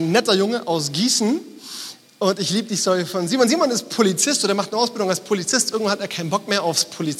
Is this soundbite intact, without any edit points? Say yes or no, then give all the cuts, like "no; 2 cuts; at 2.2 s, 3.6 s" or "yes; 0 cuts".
yes; 0 cuts